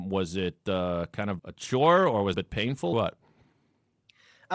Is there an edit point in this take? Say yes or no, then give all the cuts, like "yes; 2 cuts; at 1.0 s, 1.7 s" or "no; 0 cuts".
yes; 3 cuts; at 1.4 s, 2.3 s, 2.9 s